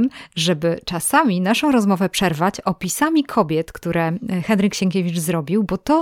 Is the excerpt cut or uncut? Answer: uncut